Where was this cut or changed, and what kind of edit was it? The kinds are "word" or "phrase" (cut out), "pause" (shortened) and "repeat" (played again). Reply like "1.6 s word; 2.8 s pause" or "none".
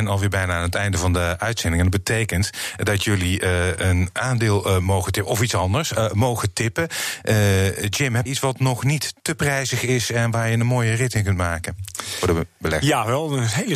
8.3 s word